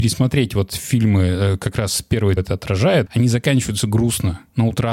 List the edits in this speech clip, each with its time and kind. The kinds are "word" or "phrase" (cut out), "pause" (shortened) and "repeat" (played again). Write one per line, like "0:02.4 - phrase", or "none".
0:02.4 - phrase